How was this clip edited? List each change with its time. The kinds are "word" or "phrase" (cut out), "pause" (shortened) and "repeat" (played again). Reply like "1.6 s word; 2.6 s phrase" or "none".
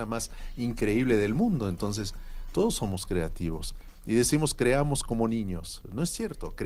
none